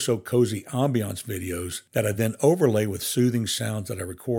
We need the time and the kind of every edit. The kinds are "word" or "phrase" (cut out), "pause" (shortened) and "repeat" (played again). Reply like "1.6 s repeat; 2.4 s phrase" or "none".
none